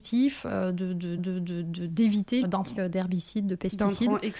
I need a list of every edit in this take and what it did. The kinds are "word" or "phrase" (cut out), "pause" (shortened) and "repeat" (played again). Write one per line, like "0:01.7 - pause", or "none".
0:01.2 - repeat
0:02.4 - word
0:02.8 - word